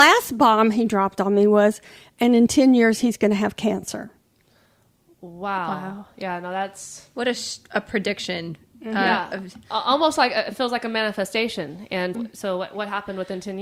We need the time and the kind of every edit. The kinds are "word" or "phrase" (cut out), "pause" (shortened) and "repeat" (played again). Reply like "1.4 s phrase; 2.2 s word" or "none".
12.1 s word